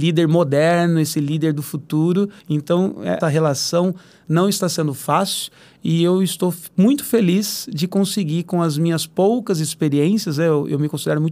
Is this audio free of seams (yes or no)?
no